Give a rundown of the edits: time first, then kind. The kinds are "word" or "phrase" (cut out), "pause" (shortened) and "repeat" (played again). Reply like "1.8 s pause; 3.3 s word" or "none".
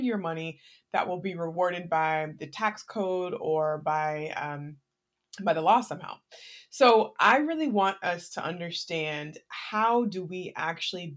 none